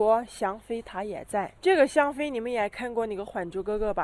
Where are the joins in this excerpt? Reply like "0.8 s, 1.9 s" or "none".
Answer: 1.6 s